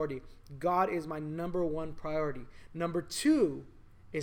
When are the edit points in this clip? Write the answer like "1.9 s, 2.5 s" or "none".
none